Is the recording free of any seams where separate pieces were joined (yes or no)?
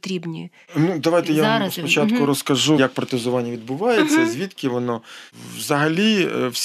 no